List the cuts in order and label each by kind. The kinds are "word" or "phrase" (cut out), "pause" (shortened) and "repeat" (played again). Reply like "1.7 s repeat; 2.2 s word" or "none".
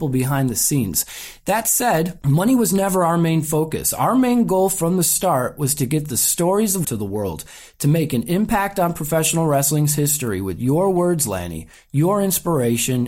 6.8 s phrase